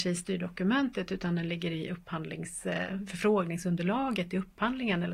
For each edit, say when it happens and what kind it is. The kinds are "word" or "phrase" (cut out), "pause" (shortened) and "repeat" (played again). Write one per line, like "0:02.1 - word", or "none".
none